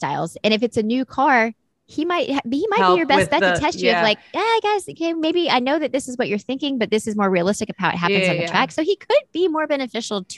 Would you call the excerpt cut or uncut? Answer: uncut